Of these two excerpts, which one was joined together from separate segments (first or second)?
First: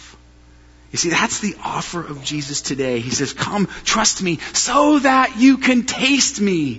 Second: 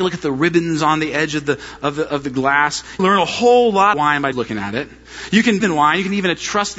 second